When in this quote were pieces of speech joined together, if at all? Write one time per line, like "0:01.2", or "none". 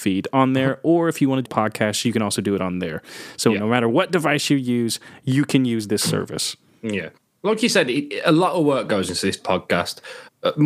0:01.5